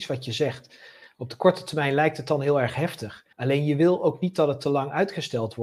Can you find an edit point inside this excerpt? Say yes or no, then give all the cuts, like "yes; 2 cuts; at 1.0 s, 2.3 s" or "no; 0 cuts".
yes; 1 cut; at 3.3 s